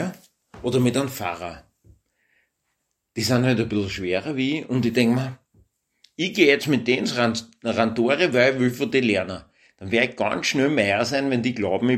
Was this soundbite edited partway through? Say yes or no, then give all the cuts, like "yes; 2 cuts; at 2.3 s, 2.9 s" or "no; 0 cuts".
no; 0 cuts